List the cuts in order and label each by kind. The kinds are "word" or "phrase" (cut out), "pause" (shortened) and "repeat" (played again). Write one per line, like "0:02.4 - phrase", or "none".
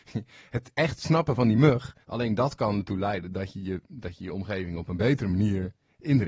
0:02.0 - pause